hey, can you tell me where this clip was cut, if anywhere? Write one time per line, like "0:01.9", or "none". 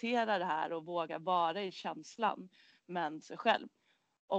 0:03.2